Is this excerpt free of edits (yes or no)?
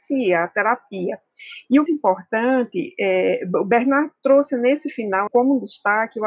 no